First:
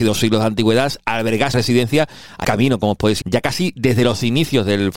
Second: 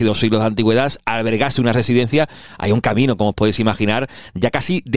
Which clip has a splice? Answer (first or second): first